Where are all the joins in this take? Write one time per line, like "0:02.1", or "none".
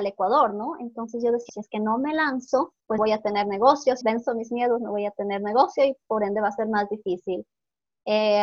0:01.5
0:03.0
0:04.0

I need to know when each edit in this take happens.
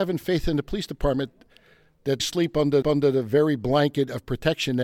0:02.2
0:02.8

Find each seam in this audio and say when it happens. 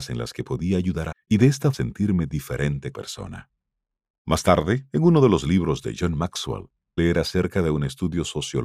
0:01.1
0:01.7
0:02.9
0:07.0

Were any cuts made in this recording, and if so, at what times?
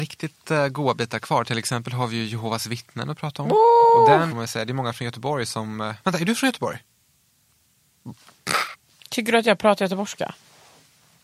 0:04.3

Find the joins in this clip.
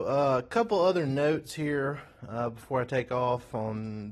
none

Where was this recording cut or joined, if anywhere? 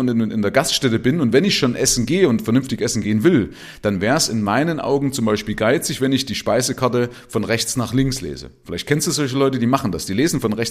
none

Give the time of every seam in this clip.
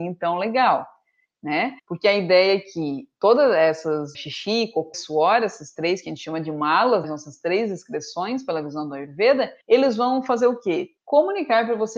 0:01.8
0:04.1
0:04.9
0:07.0
0:09.6
0:11.0

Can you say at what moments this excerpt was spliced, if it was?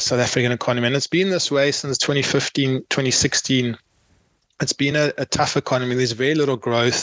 none

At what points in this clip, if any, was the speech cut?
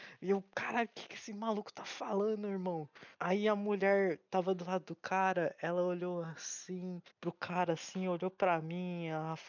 0:03.1
0:07.1

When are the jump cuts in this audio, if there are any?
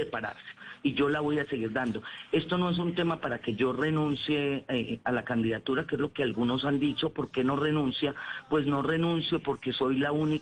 none

